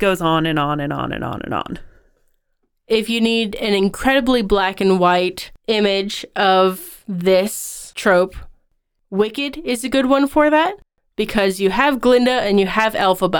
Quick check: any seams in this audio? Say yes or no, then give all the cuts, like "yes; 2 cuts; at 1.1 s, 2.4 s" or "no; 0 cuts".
no; 0 cuts